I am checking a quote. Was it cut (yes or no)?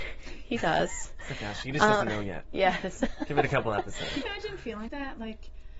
yes